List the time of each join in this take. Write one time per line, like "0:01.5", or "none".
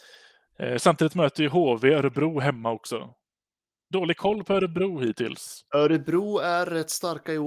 none